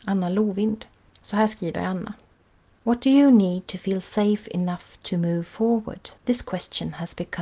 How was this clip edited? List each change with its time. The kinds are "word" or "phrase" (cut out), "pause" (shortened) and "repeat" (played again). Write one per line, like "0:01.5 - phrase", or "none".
0:01.0 - pause
0:02.4 - pause
0:06.2 - pause